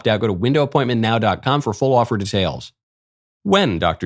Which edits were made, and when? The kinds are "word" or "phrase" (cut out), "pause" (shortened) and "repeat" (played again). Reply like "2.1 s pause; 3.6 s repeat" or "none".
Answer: none